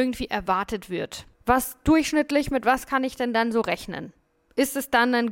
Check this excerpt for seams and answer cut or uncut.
cut